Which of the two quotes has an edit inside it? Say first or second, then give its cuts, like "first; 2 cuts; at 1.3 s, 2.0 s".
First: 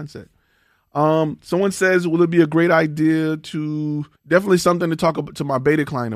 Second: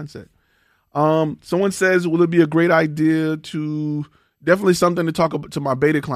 first; 1 cut; at 4.1 s